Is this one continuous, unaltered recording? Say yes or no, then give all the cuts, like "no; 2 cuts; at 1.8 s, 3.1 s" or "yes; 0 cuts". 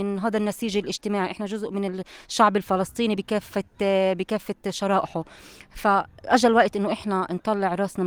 yes; 0 cuts